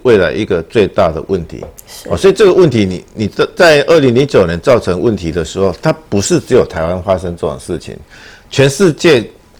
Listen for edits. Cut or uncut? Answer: uncut